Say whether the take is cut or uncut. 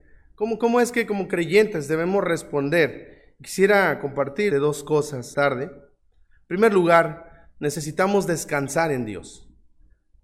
cut